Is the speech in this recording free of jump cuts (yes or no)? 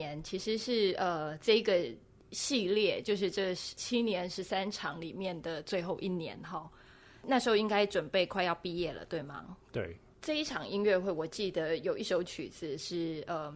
yes